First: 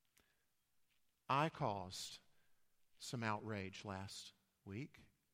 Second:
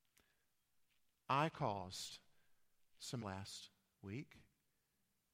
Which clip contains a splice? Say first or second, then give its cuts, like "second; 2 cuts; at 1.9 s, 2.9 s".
second; 1 cut; at 3.2 s